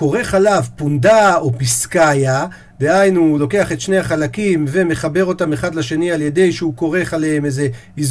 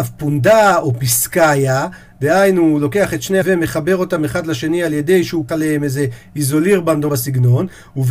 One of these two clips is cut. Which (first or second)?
second